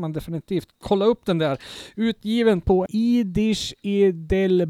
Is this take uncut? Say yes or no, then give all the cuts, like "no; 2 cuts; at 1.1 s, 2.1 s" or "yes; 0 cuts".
no; 1 cut; at 2.9 s